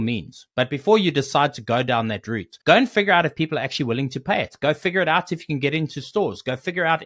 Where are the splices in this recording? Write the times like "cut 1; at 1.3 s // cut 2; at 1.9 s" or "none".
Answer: cut 1; at 2.6 s